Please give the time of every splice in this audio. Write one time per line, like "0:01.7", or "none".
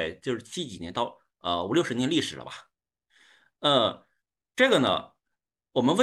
none